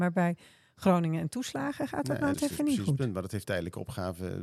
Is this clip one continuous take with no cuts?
no; 2 cuts; at 2.3 s, 3.4 s

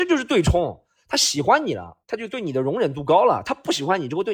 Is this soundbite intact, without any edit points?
no; 1 cut; at 2.0 s

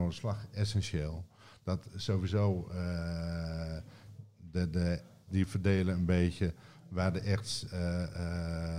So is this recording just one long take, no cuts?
no; 1 cut; at 5.3 s

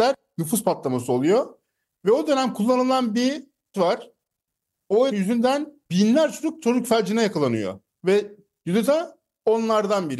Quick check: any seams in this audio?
yes; 5 cuts; at 3.7 s, 5.1 s, 5.9 s, 7.8 s, 8.9 s

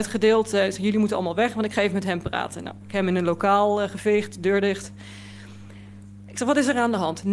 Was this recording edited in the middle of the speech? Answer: no; 0 cuts

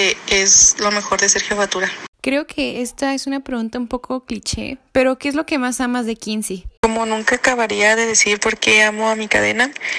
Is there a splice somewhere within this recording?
yes; 2 cuts; at 2.1 s, 6.8 s

